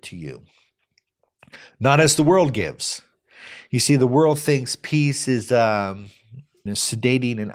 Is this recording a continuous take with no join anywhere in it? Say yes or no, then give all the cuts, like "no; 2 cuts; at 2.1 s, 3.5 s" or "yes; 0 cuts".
no; 1 cut; at 6.7 s